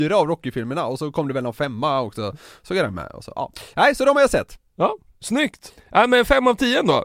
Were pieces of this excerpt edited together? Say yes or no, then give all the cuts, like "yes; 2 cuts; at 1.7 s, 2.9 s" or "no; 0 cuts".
no; 0 cuts